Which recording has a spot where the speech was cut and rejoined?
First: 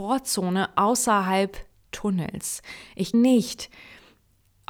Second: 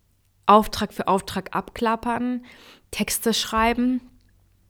first; 2 cuts; at 1.7 s, 3.1 s

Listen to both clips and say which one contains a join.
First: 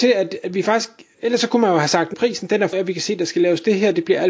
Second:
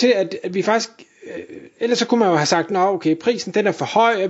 first; 3 cuts; at 1.1 s, 2.1 s, 2.7 s

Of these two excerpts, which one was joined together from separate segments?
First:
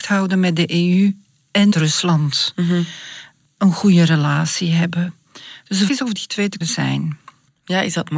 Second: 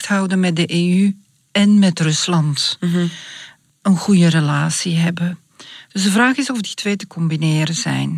first; 3 cuts; at 1.7 s, 5.9 s, 6.6 s

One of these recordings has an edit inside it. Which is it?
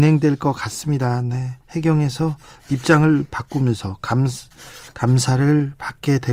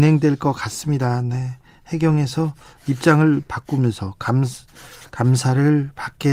first; 1 cut; at 1.6 s

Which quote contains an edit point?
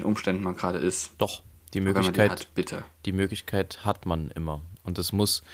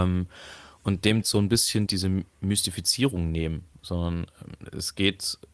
second; 2 cuts; at 1.2 s, 1.9 s

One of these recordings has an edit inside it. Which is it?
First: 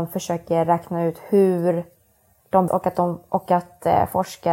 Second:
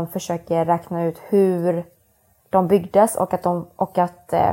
first; 1 cut; at 2.7 s

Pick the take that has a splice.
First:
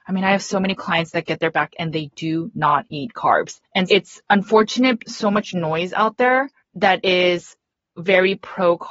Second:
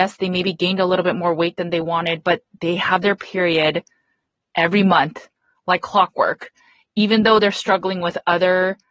first; 4 cuts; at 1.5 s, 3.9 s, 5.0 s, 6.6 s

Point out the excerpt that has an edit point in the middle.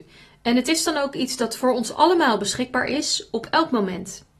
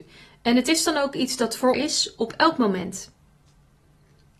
second; 1 cut; at 1.7 s

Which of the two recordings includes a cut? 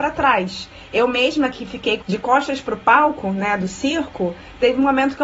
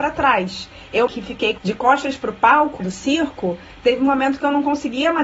second; 2 cuts; at 1.1 s, 2.8 s

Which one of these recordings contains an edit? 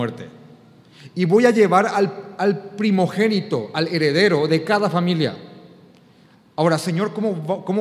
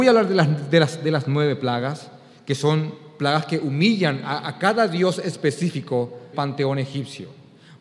second; 1 cut; at 6.3 s

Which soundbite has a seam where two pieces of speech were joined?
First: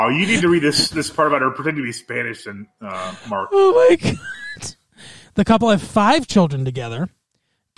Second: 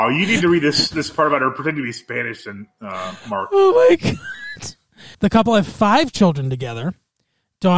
second; 1 cut; at 5.1 s

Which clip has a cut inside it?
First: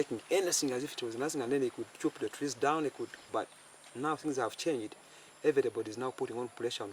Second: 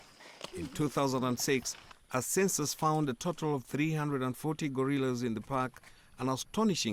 first; 1 cut; at 3.3 s

